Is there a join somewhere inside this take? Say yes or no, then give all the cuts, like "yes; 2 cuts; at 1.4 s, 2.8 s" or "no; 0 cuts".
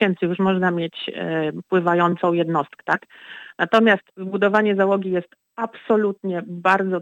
yes; 2 cuts; at 2.8 s, 4.1 s